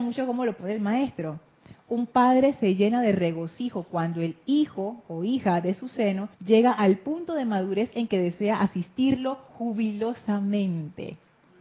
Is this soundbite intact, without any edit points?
no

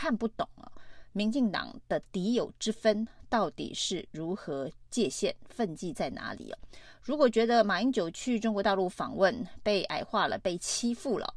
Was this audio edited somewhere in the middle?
no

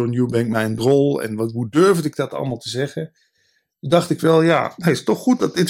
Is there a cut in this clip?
no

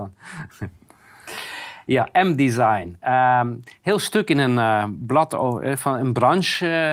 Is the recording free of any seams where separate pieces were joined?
yes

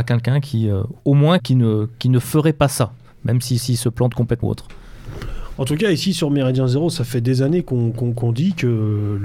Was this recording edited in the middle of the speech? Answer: yes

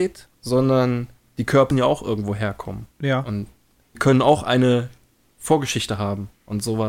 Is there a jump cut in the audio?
yes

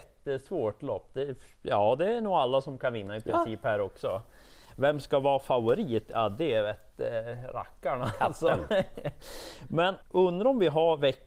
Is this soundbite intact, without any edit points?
no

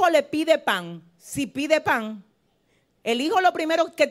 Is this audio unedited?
yes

